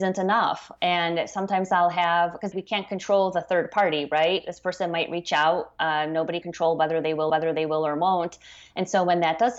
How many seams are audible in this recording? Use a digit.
3